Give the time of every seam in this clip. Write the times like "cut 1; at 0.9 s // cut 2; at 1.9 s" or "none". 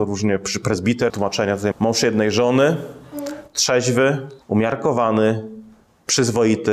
cut 1; at 1.1 s // cut 2; at 1.7 s // cut 3; at 4.4 s